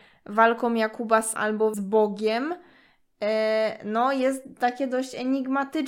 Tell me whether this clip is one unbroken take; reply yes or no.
no